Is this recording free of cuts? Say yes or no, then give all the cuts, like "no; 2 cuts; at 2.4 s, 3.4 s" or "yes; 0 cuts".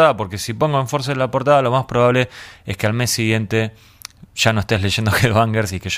yes; 0 cuts